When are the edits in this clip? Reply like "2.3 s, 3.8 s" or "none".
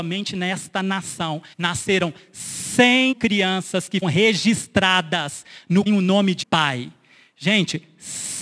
1.5 s, 3.1 s, 4.0 s, 5.9 s, 6.4 s